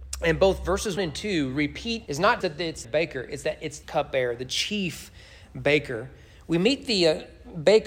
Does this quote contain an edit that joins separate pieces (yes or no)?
yes